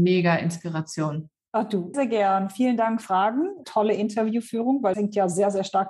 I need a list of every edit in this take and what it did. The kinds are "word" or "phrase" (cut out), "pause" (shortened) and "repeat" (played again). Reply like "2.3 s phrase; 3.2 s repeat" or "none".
1.9 s word; 3.0 s phrase; 3.6 s phrase; 4.9 s word